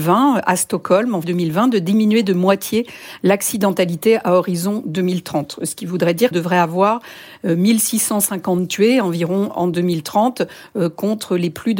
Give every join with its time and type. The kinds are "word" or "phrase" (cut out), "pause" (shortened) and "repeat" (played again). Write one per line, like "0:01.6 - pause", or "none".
0:01.2 - word
0:06.3 - phrase